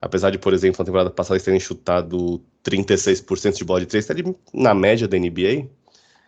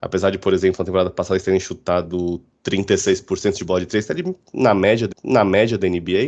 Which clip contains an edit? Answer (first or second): second